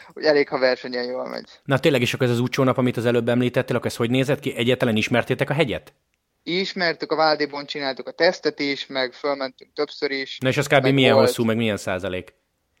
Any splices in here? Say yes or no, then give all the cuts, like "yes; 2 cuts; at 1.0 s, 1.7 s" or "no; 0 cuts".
no; 0 cuts